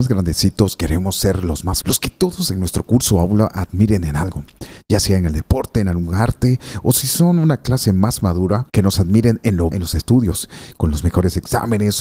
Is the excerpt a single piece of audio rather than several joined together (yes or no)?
no